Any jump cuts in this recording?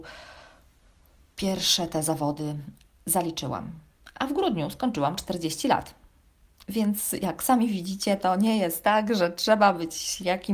no; 0 cuts

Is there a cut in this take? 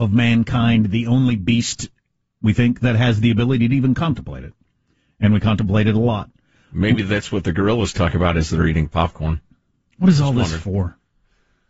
no; 0 cuts

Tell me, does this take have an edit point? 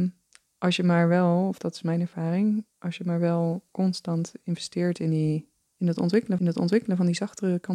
yes; 4 cuts; at 2.7 s, 3.7 s, 5.5 s, 6.4 s

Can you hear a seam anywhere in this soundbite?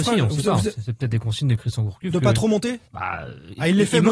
yes; 1 cut; at 2.8 s

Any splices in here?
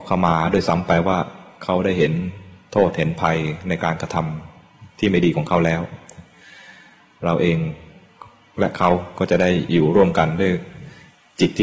no; 0 cuts

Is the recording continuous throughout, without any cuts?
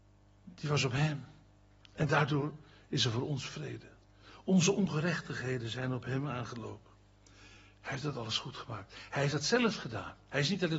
yes; 0 cuts

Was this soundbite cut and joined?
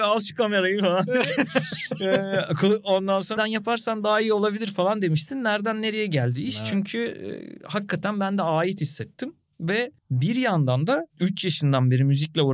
yes; 3 cuts; at 3.4 s, 10.0 s, 11.1 s

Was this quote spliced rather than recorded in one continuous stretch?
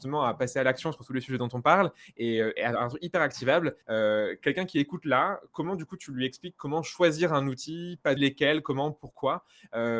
yes; 3 cuts; at 2.6 s, 3.8 s, 8.2 s

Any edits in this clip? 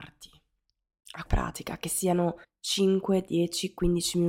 yes; 2 cuts; at 1.2 s, 2.4 s

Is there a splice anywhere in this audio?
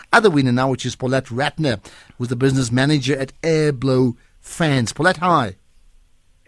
no; 0 cuts

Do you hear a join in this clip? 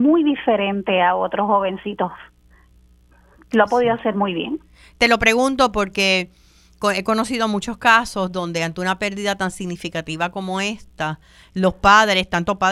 no; 0 cuts

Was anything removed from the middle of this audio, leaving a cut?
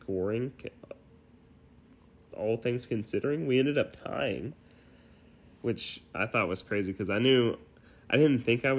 no; 0 cuts

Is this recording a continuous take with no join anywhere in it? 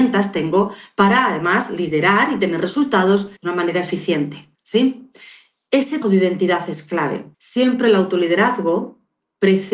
no; 4 cuts; at 3.4 s, 4.5 s, 6.0 s, 7.3 s

